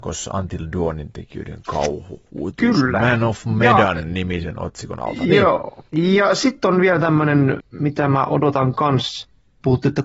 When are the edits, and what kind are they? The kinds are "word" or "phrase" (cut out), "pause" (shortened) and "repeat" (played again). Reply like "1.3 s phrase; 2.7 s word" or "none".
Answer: 2.3 s pause; 5.9 s pause; 7.7 s pause